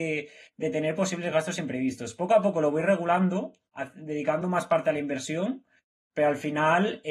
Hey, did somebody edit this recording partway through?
no; 0 cuts

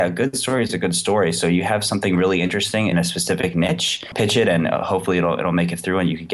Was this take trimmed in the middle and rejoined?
yes; 1 cut; at 2.9 s

